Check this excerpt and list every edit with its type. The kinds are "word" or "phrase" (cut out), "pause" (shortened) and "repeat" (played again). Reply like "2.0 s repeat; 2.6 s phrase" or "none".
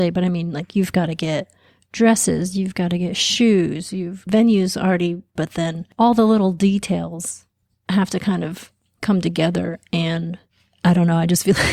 4.3 s phrase; 5.4 s word